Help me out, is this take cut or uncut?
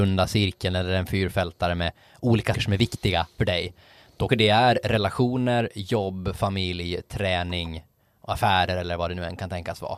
cut